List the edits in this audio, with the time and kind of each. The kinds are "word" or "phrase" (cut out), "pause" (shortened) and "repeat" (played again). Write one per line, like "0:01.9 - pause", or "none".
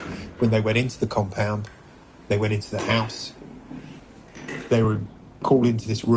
none